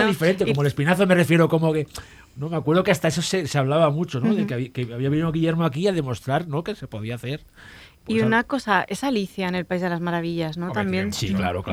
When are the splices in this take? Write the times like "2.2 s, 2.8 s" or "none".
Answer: none